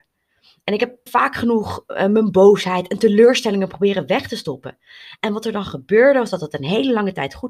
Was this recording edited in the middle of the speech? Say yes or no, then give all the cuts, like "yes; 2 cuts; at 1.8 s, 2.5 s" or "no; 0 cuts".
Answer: yes; 1 cut; at 1.1 s